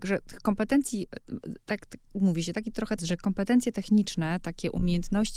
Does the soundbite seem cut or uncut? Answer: cut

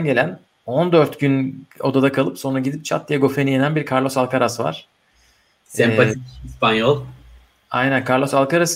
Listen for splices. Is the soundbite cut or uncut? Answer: uncut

